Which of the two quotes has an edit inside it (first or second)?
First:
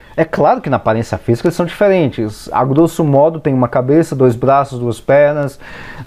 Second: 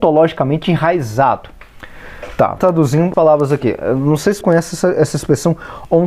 second